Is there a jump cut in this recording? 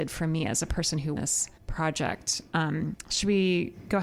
yes; 2 cuts; at 1.2 s, 1.6 s

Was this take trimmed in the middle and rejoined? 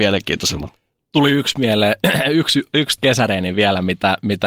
yes; 1 cut; at 3.0 s

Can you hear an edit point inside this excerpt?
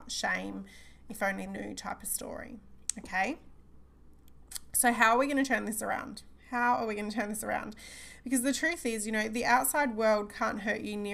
yes; 1 cut; at 1.5 s

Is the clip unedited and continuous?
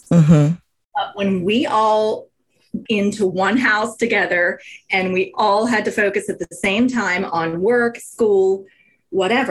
no; 1 cut; at 2.9 s

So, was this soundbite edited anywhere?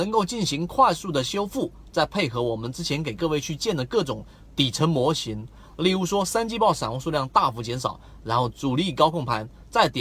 no; 0 cuts

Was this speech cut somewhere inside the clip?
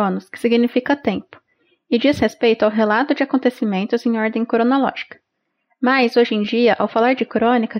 no; 0 cuts

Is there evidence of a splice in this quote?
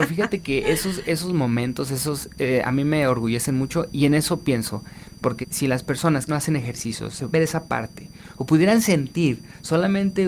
yes; 4 cuts; at 3.9 s, 5.4 s, 6.3 s, 7.3 s

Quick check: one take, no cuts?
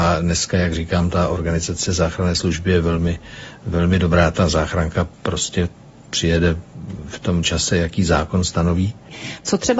no; 3 cuts; at 4.3 s, 5.1 s, 7.4 s

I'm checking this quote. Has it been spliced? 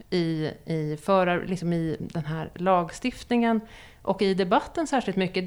no; 0 cuts

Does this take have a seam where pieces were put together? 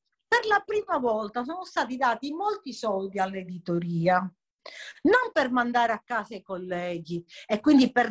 no; 0 cuts

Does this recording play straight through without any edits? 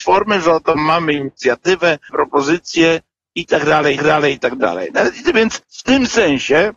no; 3 cuts; at 2.1 s, 4.0 s, 5.6 s

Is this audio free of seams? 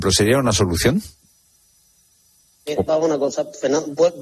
yes; 0 cuts

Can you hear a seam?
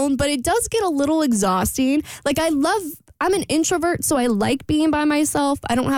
no; 0 cuts

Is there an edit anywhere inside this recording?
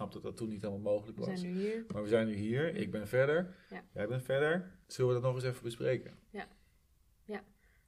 yes; 1 cut; at 4.8 s

